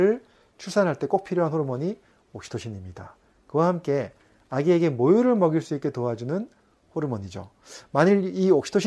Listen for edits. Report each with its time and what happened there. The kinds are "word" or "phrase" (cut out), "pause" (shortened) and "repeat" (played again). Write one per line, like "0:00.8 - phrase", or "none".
none

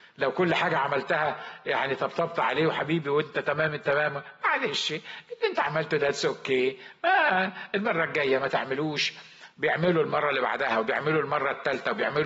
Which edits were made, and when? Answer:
none

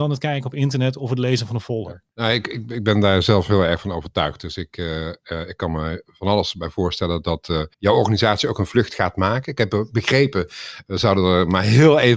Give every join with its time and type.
0:02.1 - pause
0:07.7 - pause

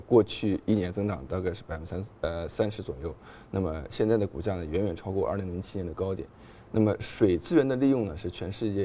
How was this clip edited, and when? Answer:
none

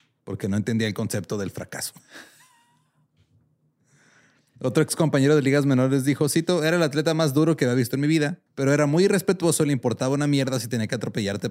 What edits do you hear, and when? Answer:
0:08.5 - pause

